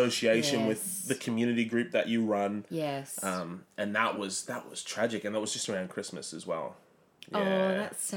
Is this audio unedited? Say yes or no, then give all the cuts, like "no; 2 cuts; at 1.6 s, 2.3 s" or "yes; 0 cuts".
yes; 0 cuts